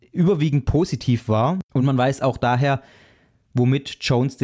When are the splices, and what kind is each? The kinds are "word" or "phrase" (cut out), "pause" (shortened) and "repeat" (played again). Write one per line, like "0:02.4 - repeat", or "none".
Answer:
none